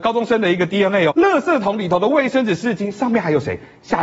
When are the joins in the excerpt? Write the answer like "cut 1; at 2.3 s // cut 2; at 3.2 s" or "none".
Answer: cut 1; at 1.1 s